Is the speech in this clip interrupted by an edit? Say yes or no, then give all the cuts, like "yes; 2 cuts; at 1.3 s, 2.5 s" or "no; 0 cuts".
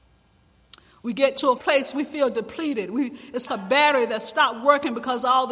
yes; 2 cuts; at 1.6 s, 3.5 s